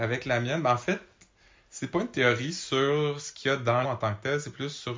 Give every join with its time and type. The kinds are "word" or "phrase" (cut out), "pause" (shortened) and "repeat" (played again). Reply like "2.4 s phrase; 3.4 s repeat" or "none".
3.8 s word